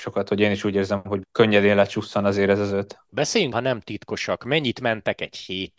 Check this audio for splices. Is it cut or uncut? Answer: cut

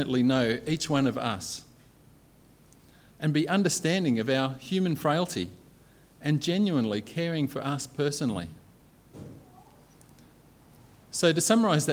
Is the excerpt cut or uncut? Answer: uncut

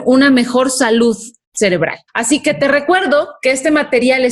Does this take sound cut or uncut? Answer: cut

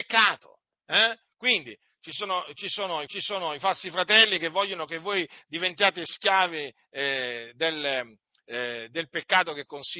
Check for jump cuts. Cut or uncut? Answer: cut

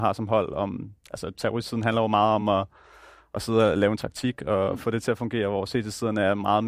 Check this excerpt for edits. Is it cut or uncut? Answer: uncut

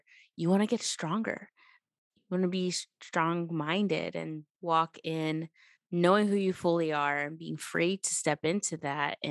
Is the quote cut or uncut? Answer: cut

